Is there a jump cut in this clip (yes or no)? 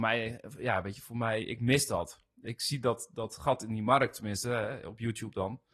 no